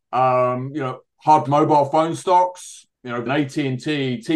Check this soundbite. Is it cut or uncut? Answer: cut